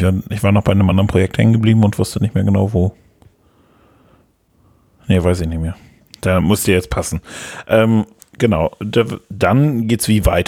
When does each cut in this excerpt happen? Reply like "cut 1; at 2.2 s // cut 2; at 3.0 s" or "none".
none